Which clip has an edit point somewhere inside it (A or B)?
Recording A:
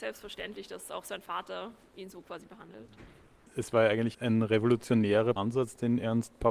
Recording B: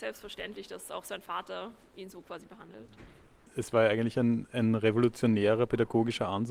A